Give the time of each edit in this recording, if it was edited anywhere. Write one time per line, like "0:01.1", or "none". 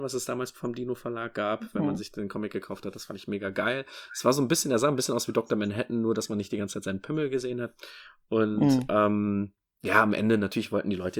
none